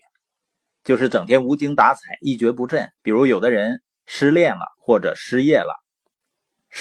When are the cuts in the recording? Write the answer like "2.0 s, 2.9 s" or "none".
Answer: 3.0 s, 4.8 s